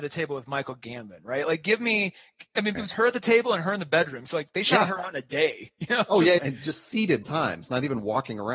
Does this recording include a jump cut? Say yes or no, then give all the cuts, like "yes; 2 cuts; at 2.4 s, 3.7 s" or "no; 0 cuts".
yes; 3 cuts; at 2.7 s, 6.4 s, 7.2 s